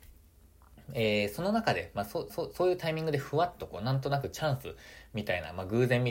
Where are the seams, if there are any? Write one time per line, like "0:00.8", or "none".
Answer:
0:02.3